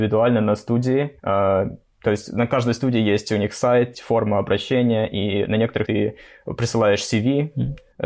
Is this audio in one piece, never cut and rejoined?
no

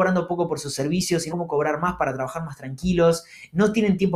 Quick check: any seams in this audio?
yes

